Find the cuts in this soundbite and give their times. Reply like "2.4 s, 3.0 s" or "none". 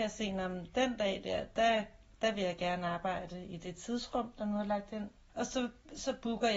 5.1 s